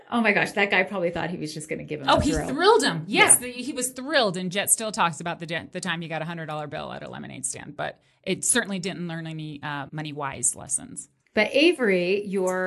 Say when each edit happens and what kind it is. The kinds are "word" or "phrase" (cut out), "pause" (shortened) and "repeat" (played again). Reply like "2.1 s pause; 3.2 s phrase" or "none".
9.9 s word